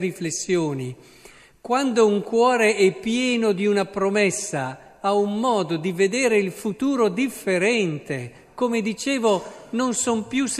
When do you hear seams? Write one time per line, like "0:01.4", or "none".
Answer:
none